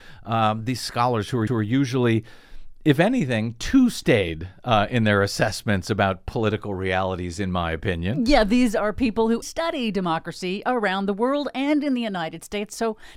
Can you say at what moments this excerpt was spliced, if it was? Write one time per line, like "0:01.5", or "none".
0:01.5
0:09.4